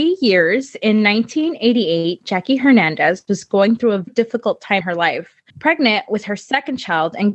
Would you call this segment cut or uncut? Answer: cut